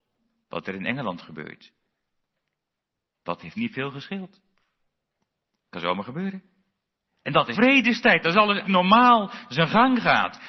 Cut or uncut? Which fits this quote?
cut